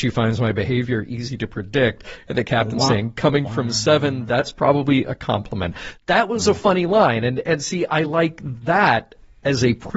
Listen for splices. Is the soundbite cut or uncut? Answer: uncut